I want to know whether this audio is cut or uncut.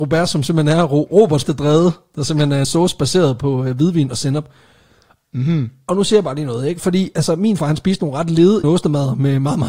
cut